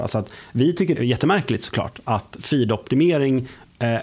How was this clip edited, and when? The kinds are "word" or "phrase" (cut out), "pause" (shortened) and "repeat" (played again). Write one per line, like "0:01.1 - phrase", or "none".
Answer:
0:00.9 - phrase
0:02.4 - word